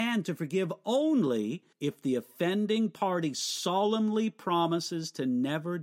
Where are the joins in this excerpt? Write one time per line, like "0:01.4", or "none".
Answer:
0:01.7